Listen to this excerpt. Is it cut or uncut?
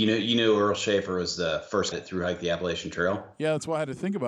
cut